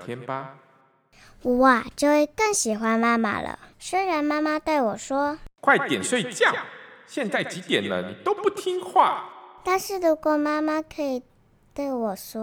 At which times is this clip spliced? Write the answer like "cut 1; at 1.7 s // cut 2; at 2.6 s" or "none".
cut 1; at 3.7 s